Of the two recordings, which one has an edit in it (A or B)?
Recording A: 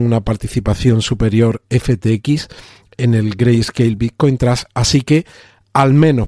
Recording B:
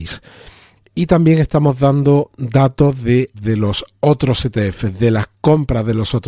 B